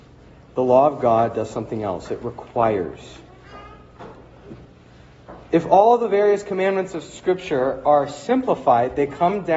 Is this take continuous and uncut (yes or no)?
yes